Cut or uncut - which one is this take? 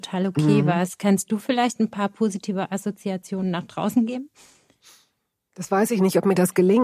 uncut